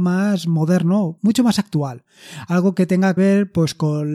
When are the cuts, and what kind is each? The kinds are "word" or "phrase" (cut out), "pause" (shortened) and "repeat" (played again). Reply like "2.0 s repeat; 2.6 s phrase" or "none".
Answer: 1.2 s word; 3.2 s word